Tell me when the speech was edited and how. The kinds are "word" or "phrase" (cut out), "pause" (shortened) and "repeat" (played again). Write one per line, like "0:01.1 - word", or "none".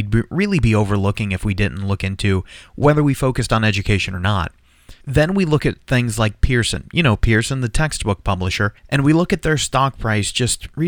0:05.0 - pause
0:08.8 - pause